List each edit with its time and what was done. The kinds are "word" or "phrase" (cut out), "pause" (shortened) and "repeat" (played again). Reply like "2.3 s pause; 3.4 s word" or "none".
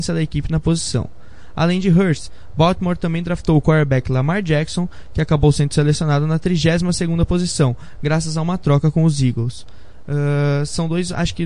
none